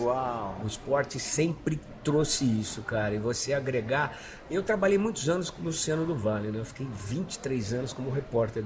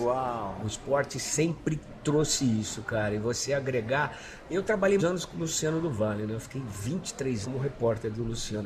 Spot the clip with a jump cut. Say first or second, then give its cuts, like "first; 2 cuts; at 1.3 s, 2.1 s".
second; 2 cuts; at 5.0 s, 7.4 s